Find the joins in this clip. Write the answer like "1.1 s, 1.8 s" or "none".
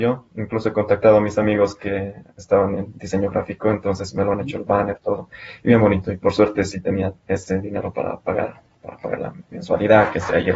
none